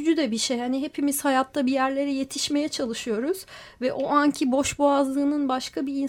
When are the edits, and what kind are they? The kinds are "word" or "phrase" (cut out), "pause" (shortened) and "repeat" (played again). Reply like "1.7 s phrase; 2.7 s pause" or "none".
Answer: none